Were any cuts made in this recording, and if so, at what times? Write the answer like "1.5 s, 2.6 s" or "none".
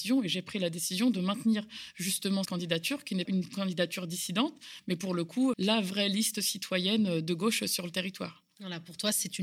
2.5 s, 3.3 s, 5.5 s